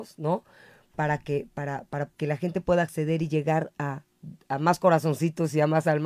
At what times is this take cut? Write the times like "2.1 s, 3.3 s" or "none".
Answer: 2.1 s